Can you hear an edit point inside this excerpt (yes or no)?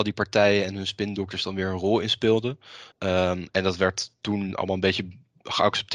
yes